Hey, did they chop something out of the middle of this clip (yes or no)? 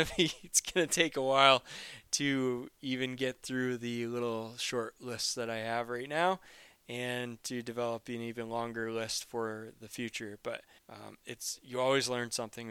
yes